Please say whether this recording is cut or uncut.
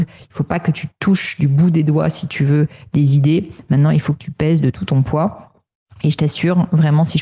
uncut